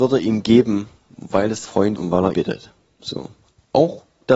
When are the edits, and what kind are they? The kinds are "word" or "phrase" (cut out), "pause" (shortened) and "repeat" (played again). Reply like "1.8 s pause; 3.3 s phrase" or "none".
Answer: 1.6 s word; 1.9 s word; 2.3 s word